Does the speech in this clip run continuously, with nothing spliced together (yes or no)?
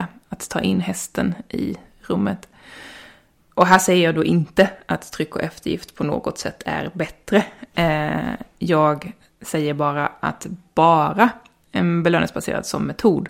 yes